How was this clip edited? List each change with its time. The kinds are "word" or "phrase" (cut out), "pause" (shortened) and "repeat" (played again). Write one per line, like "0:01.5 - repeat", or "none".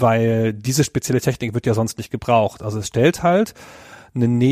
none